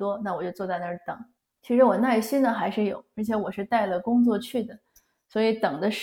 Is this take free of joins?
no; 1 cut; at 1.4 s

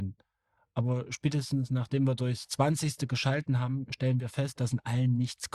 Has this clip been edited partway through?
no; 0 cuts

